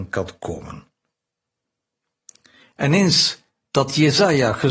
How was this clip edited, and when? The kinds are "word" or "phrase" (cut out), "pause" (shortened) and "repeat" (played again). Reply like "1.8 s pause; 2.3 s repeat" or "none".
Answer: none